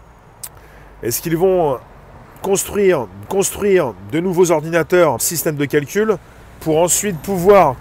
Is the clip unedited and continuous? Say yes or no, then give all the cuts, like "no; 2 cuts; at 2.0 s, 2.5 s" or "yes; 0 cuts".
no; 2 cuts; at 3.3 s, 5.2 s